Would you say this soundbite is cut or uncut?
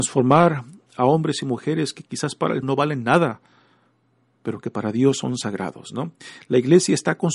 cut